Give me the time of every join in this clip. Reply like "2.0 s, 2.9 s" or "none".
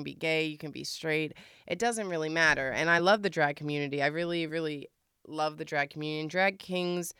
none